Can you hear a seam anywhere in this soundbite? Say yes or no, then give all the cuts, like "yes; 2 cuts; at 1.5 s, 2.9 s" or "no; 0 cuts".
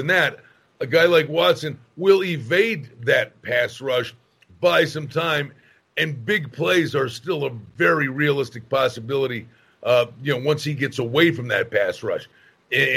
no; 0 cuts